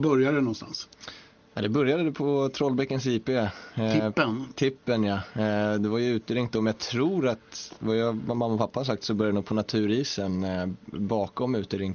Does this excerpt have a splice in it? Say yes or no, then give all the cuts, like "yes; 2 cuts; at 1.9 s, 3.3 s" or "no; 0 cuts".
no; 0 cuts